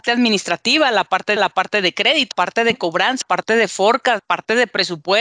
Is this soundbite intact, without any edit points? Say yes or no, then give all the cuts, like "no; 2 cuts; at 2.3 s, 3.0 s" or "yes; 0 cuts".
no; 4 cuts; at 1.4 s, 2.3 s, 3.2 s, 4.2 s